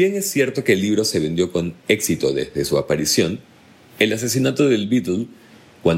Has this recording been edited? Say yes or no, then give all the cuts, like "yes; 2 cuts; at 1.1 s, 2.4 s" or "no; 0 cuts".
no; 0 cuts